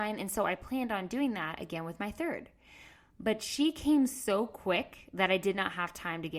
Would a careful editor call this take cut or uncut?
uncut